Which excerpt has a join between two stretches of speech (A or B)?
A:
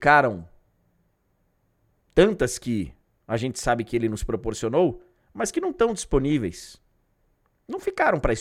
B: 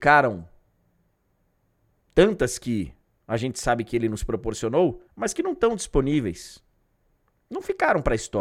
B